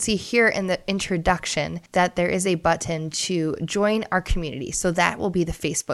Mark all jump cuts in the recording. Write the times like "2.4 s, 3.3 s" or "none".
1.9 s

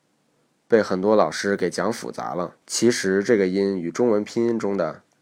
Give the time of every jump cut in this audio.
2.6 s

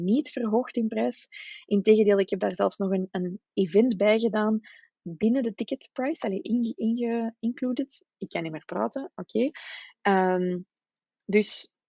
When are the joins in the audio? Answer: none

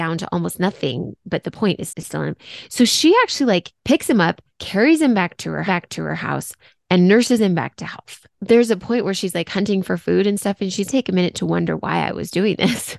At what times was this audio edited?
1.9 s, 3.8 s, 4.5 s, 5.7 s, 8.3 s, 10.9 s

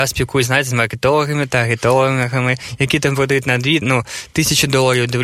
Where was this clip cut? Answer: 3.8 s

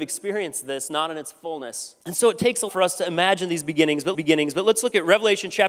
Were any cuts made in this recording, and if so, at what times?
2.0 s, 2.7 s, 4.1 s

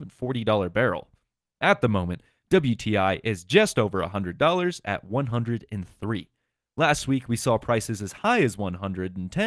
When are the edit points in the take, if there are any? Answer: none

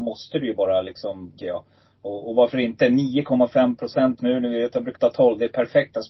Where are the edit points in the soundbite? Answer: 1.4 s, 4.2 s, 5.0 s

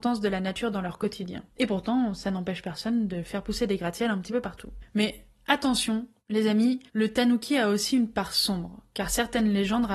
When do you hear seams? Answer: 1.5 s, 6.2 s, 6.9 s

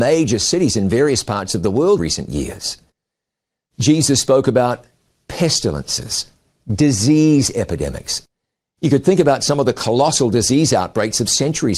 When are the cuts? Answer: 2.0 s

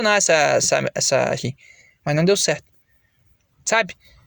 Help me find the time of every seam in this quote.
1.4 s

